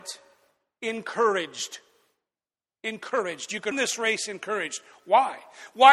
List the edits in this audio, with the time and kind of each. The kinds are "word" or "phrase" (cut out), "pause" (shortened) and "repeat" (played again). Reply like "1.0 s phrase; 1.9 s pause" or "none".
3.7 s word